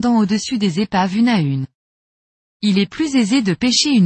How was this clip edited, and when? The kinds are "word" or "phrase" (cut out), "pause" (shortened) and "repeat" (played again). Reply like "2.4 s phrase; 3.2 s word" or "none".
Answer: none